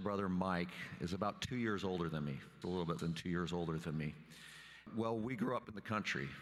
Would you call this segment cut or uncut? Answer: cut